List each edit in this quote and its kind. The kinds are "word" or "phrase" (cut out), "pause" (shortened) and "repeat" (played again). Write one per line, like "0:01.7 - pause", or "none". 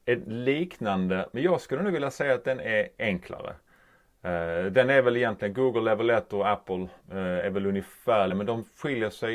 0:07.0 - pause
0:08.3 - word